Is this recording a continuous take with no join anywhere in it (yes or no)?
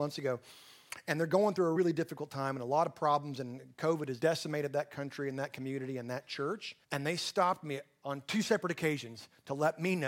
no